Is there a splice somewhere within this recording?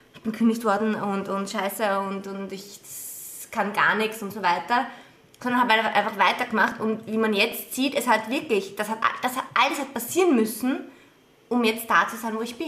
no; 0 cuts

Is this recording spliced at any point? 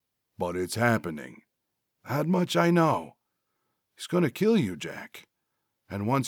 no; 0 cuts

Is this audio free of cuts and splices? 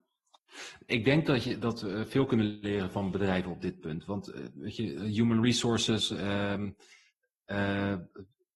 yes; 0 cuts

